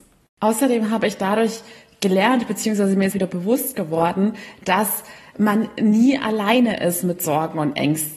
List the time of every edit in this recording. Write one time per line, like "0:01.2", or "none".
0:03.1